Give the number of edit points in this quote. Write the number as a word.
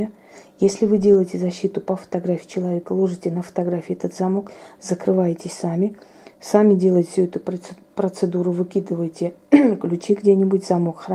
zero